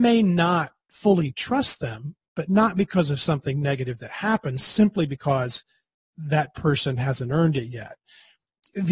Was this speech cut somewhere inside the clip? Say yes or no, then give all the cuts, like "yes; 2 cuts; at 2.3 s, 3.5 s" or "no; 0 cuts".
no; 0 cuts